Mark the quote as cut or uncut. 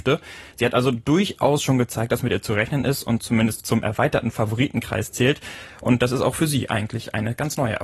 uncut